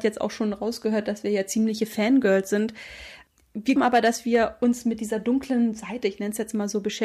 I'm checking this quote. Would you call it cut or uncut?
cut